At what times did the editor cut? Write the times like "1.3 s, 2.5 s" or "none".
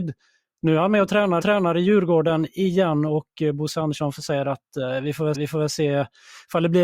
1.4 s, 5.3 s